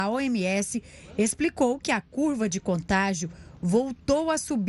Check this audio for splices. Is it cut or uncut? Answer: uncut